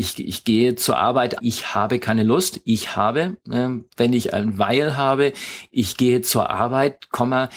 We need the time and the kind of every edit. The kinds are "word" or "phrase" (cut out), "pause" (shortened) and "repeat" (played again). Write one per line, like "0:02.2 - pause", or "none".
0:01.4 - word